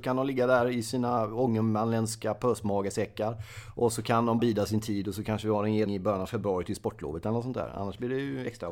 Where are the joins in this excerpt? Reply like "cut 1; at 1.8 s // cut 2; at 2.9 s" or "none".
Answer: cut 1; at 4.4 s // cut 2; at 5.9 s